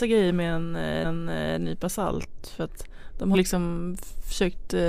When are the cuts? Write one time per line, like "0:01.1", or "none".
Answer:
0:01.0
0:03.3

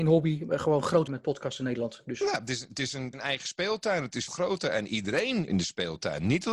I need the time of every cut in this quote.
0:01.1
0:03.1
0:04.3
0:05.5

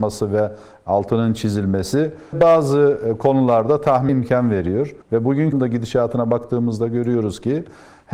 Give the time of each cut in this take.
0:02.3
0:04.1
0:05.0
0:05.5

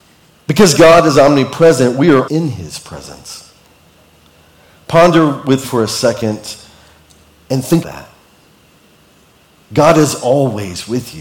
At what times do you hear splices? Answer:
0:02.3
0:05.6
0:07.8

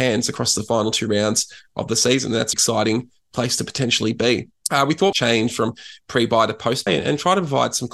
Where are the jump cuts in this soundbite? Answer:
0:02.5
0:04.5
0:05.1
0:06.9

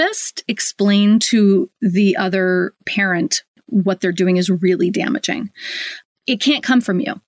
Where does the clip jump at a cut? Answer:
none

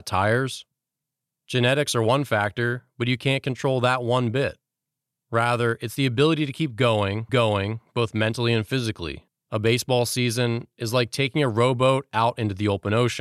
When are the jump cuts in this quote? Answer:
0:07.3
0:09.3

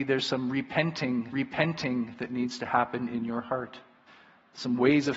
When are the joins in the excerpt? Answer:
0:01.3
0:04.1

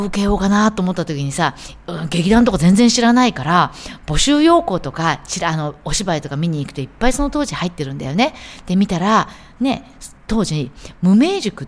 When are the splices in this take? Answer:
0:10.2

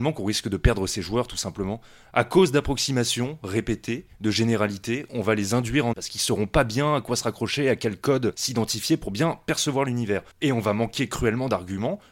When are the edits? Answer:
0:05.9
0:10.3

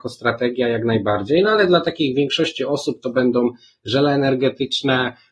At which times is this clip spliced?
none

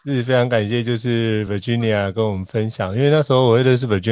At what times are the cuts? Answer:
none

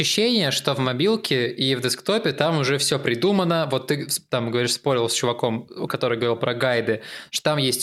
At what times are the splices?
none

